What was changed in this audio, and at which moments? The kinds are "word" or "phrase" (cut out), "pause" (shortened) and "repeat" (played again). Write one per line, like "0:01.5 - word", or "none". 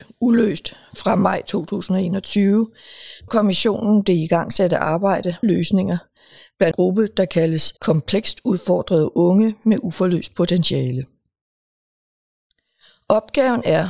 0:03.3 - word
0:05.4 - phrase
0:06.7 - phrase
0:07.8 - pause